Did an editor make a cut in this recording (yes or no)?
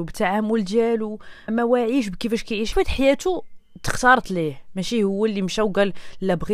yes